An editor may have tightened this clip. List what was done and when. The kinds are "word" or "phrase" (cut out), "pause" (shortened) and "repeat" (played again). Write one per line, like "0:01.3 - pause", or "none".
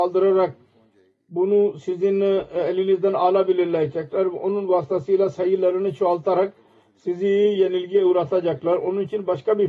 none